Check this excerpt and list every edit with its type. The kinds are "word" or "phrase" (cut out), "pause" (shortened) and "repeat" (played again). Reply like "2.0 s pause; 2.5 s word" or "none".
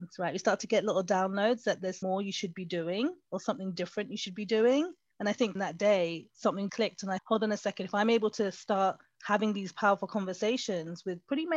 2.0 s word; 5.1 s pause; 5.6 s phrase; 6.7 s word; 7.2 s word